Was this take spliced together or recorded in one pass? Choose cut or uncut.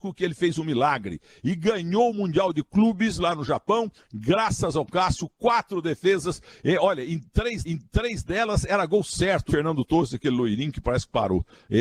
cut